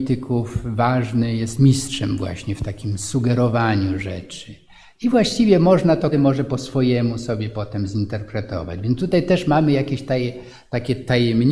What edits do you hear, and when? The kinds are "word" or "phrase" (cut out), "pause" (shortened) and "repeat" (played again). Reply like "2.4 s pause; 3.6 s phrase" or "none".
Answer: 6.1 s word